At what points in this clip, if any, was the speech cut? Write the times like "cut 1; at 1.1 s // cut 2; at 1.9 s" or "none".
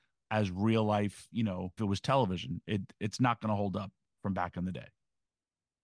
cut 1; at 1.8 s